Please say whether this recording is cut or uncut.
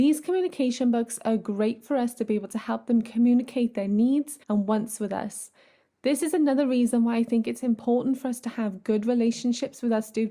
cut